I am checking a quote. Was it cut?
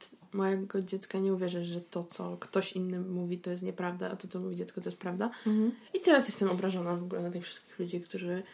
no; 0 cuts

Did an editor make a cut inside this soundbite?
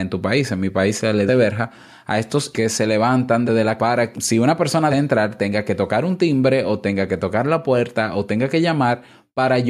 yes; 6 cuts; at 1.3 s, 2.5 s, 3.5 s, 3.8 s, 4.1 s, 4.9 s

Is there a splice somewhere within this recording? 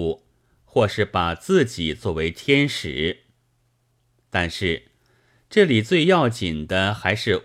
no; 0 cuts

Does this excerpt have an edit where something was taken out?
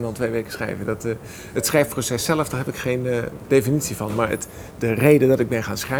yes; 2 cuts; at 3.5 s, 4.7 s

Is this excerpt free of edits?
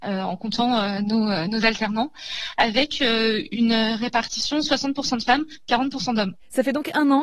yes; 0 cuts

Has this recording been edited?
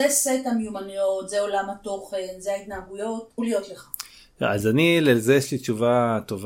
yes; 1 cut; at 3.4 s

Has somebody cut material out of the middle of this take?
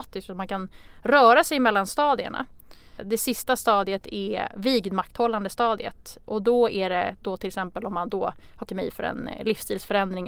yes; 1 cut; at 8.6 s

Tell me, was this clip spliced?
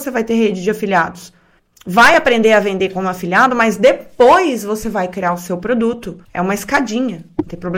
yes; 2 cuts; at 1.6 s, 6.2 s

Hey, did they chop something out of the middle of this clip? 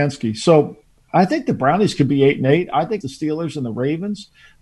yes; 2 cuts; at 0.9 s, 3.0 s

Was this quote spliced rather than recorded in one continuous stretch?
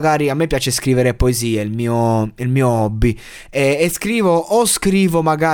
no; 0 cuts

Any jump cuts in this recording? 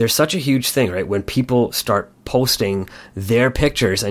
yes; 1 cut; at 2.2 s

